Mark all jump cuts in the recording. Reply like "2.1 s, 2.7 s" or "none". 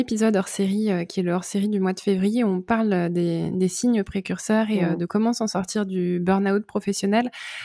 none